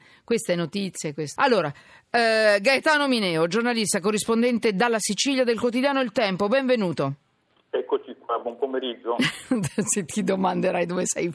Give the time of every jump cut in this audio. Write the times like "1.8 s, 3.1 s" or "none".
1.4 s